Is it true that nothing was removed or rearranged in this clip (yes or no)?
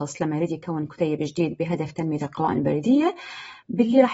yes